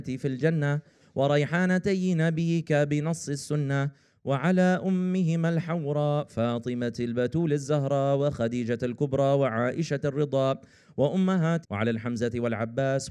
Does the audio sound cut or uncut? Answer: cut